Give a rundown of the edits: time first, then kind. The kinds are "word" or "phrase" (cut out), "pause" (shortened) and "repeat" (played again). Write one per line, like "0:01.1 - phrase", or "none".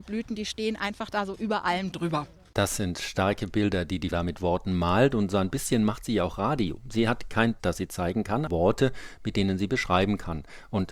0:04.1 - word
0:07.6 - word
0:08.5 - word